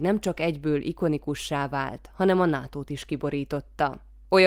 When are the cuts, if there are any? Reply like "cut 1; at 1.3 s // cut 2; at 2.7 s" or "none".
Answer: none